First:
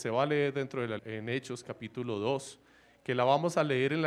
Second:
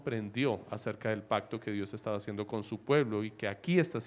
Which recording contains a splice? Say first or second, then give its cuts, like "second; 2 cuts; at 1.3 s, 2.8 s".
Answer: first; 1 cut; at 1.0 s